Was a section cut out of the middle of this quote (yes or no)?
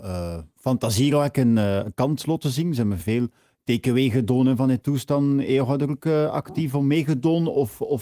no